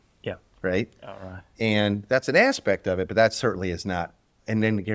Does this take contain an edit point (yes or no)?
no